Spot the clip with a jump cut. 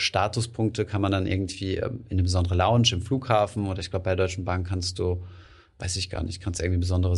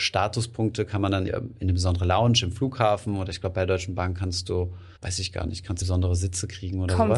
second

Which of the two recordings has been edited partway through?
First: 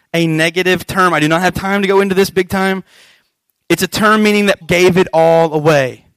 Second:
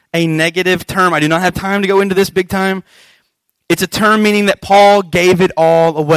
first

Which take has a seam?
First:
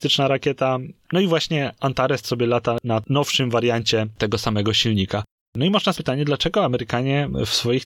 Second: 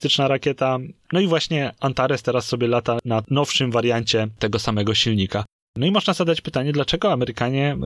first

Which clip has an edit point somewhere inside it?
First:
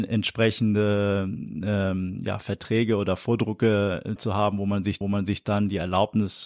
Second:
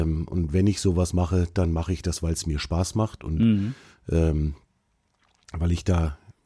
first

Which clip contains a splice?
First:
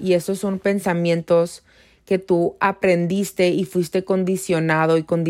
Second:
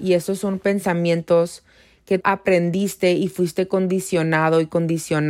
second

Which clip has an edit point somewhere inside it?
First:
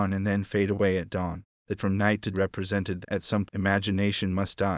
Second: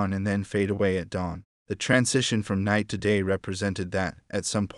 first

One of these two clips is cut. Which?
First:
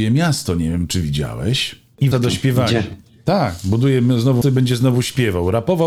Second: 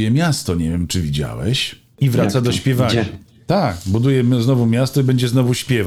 first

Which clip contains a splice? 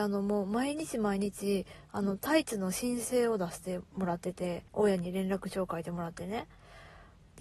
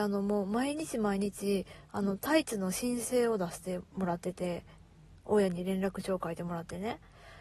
first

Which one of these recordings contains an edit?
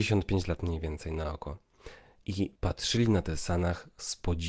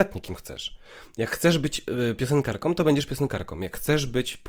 first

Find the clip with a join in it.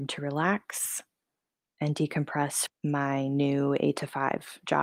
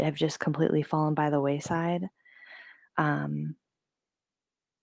first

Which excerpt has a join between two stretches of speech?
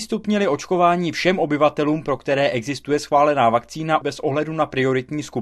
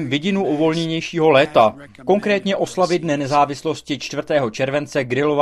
first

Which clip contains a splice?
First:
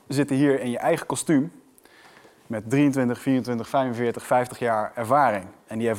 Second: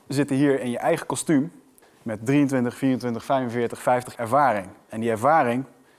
second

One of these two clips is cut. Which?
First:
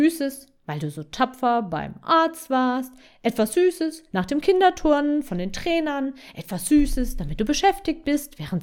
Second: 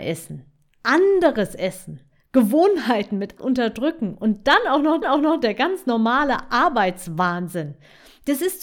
second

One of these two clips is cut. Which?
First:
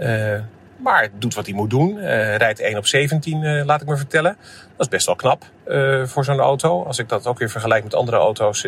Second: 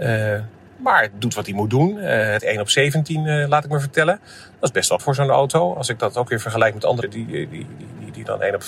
second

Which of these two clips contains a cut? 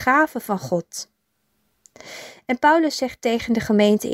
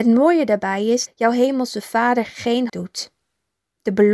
second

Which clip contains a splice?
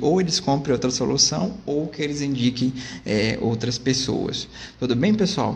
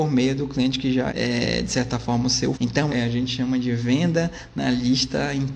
second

